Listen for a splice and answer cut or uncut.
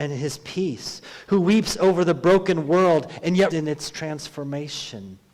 cut